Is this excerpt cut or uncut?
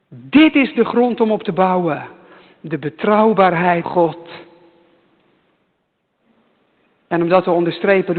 cut